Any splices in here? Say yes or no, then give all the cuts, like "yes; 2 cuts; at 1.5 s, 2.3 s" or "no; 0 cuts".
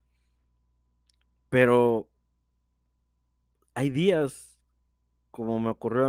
no; 0 cuts